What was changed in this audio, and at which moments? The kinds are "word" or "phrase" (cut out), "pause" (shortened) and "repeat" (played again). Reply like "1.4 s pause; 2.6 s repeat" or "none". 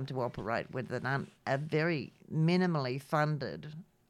2.2 s pause